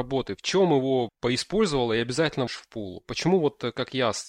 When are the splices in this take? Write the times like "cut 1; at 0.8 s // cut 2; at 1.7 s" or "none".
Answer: cut 1; at 1.1 s // cut 2; at 2.5 s